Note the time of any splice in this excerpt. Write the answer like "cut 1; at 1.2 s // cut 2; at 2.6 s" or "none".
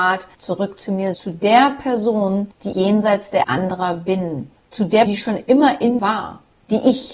cut 1; at 1.1 s // cut 2; at 2.7 s // cut 3; at 3.4 s // cut 4; at 5.1 s // cut 5; at 6.0 s

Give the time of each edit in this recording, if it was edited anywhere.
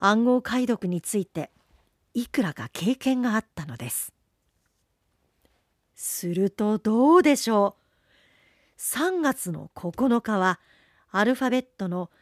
none

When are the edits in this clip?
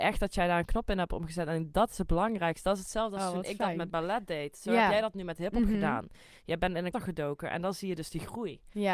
cut 1; at 6.9 s

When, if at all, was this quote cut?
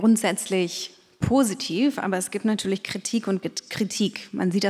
none

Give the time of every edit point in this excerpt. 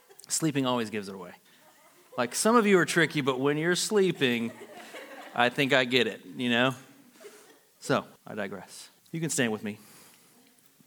cut 1; at 8.2 s // cut 2; at 9.0 s

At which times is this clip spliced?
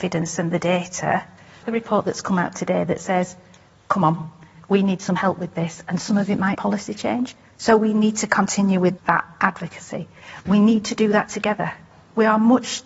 cut 1; at 1.6 s // cut 2; at 6.5 s // cut 3; at 9.0 s

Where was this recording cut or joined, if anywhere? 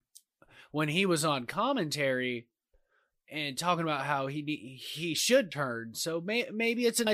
none

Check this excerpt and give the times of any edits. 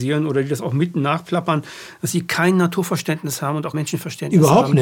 cut 1; at 3.7 s

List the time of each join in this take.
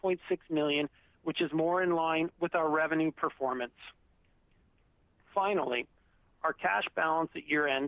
none

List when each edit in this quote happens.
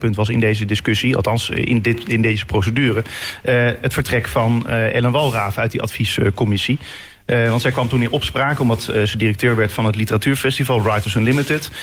none

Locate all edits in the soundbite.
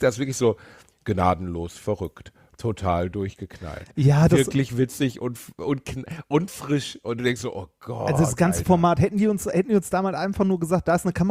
none

